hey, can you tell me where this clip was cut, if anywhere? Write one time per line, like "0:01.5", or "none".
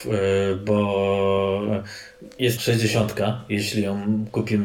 0:02.6